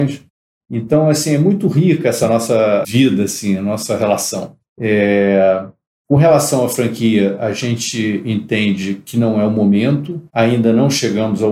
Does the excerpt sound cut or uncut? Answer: cut